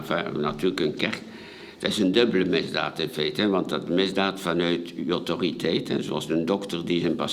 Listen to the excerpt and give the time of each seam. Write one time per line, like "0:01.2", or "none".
none